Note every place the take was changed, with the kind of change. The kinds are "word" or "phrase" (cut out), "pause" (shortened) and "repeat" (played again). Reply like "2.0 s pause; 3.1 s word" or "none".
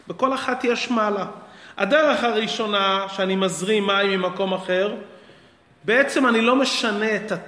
none

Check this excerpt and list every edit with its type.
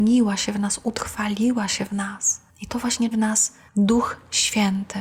1.9 s phrase; 2.5 s pause; 3.1 s word; 3.7 s pause

